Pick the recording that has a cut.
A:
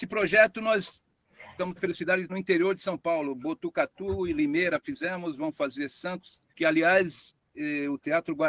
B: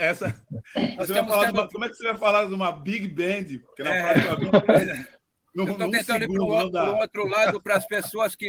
A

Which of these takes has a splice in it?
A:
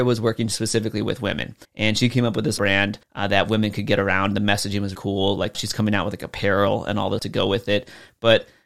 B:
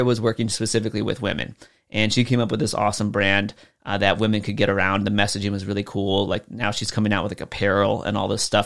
A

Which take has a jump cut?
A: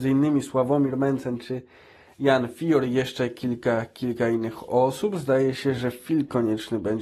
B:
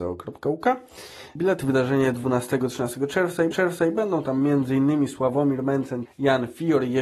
B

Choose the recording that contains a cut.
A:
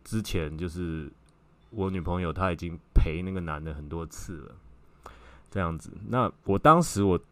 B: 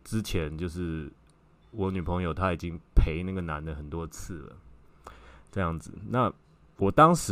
A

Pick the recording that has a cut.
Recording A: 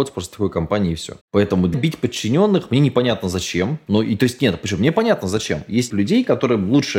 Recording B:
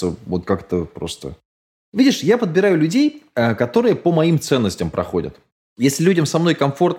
A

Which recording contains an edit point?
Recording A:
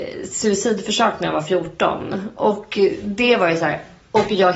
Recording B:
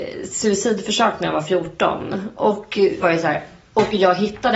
B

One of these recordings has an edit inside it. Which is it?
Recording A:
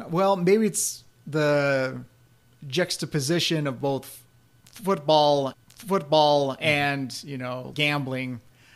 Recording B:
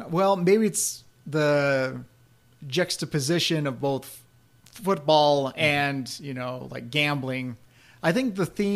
A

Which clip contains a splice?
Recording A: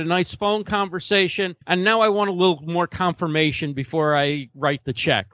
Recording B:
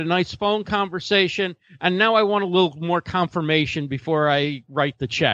A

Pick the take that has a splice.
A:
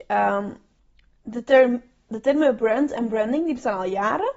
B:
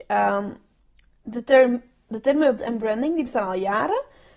B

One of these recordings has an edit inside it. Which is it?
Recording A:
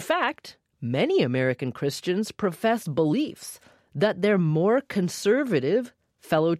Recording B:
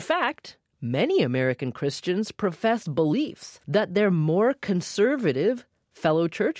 B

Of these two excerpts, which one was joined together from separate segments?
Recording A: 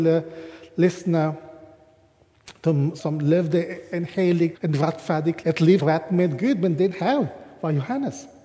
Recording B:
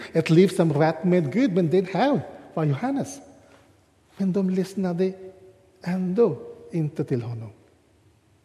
A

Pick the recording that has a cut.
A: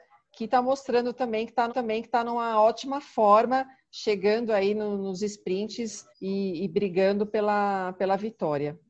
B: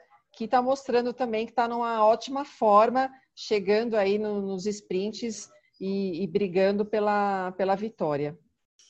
A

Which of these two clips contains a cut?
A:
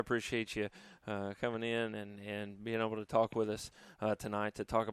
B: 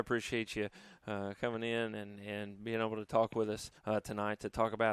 B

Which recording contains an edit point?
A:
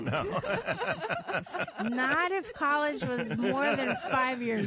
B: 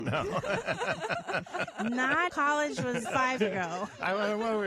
B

